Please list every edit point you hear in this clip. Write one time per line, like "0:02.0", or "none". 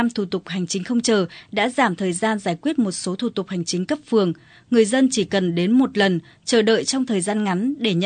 none